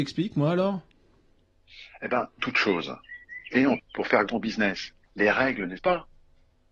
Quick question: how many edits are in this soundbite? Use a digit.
5